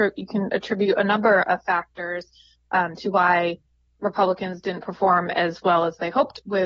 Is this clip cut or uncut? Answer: uncut